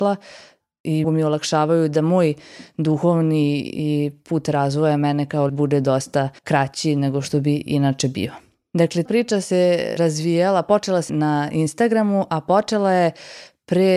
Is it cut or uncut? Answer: cut